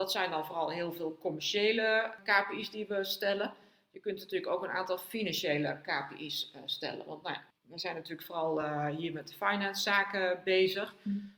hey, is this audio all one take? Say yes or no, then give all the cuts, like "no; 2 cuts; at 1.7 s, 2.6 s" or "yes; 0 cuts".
yes; 0 cuts